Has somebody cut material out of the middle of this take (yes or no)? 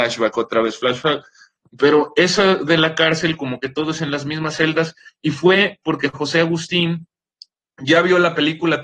no